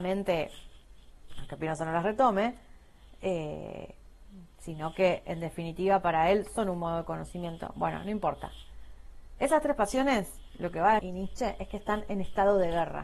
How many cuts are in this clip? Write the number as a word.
one